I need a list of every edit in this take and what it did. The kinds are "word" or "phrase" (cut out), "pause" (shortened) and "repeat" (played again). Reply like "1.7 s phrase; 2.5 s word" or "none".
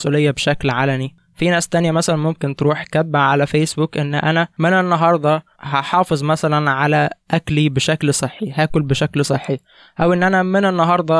5.5 s pause